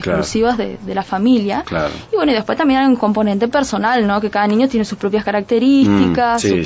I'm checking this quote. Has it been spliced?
no; 0 cuts

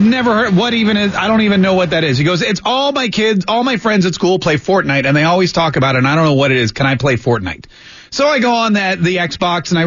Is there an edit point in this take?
no; 0 cuts

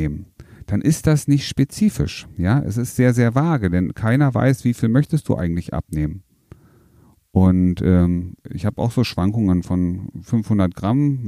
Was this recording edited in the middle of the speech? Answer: no; 0 cuts

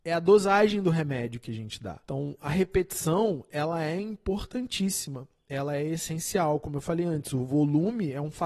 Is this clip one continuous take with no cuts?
no; 1 cut; at 2.0 s

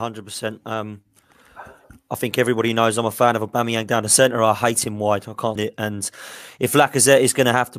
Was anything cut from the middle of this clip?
yes; 1 cut; at 5.6 s

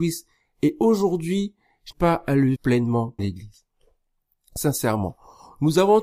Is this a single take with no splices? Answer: no; 3 cuts; at 1.9 s, 2.5 s, 3.2 s

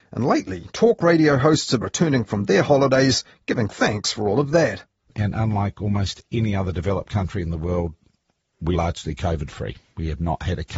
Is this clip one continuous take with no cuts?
no; 2 cuts; at 1.8 s, 8.7 s

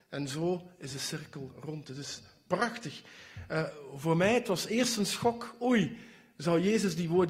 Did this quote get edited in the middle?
no; 0 cuts

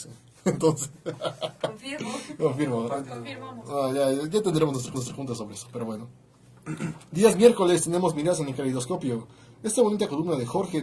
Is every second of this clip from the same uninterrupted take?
no; 1 cut; at 4.9 s

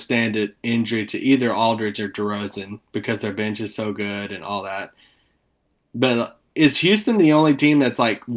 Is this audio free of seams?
yes; 0 cuts

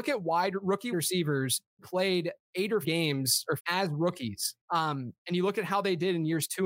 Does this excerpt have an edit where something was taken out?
yes; 6 cuts; at 0.9 s, 1.8 s, 2.4 s, 2.8 s, 3.6 s, 4.6 s

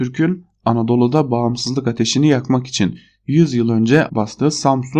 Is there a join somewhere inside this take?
yes; 1 cut; at 4.1 s

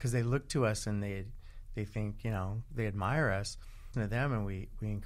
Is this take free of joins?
no; 1 cut; at 3.9 s

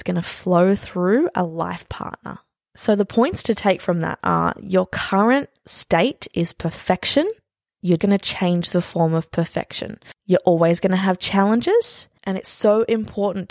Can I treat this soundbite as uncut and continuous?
no; 1 cut; at 8.0 s

